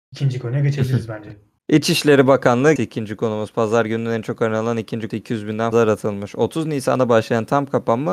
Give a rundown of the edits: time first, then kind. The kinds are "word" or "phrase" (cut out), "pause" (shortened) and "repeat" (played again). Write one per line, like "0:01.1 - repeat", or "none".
0:01.6 - pause
0:02.8 - word
0:05.1 - word
0:05.7 - word